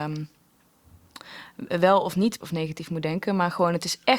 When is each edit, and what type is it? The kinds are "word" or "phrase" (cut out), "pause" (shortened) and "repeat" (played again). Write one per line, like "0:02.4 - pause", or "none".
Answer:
0:02.4 - word

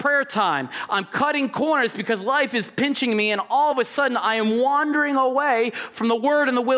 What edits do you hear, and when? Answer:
none

